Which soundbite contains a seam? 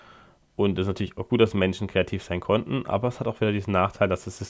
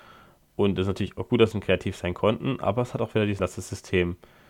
second; 2 cuts; at 1.5 s, 3.4 s

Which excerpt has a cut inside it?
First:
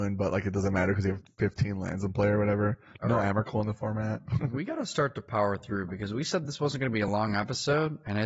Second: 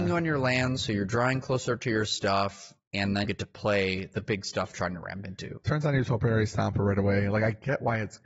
second; 2 cuts; at 3.2 s, 4.7 s

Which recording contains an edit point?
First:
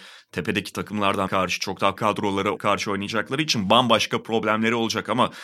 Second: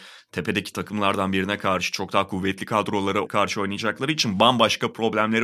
first; 2 cuts; at 1.3 s, 2.0 s

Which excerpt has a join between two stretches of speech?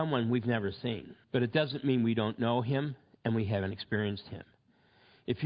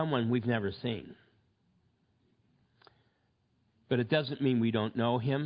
first; 1 cut; at 1.2 s

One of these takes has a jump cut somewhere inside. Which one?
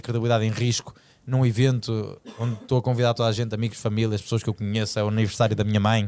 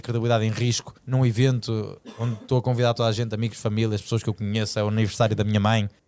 second; 1 cut; at 1.0 s

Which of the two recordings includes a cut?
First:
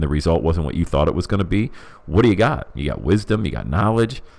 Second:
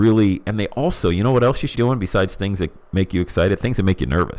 second; 1 cut; at 1.7 s

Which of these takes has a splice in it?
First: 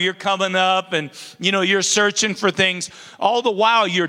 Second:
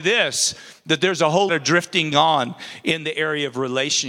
second; 2 cuts; at 1.5 s, 2.1 s

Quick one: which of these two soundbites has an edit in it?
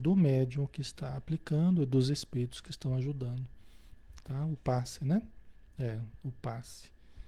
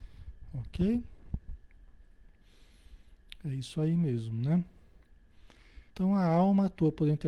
second; 1 cut; at 5.9 s

